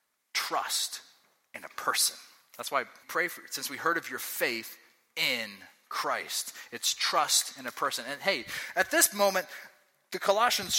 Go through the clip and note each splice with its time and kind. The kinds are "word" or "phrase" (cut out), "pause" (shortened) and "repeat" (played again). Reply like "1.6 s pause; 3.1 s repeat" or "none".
3.0 s phrase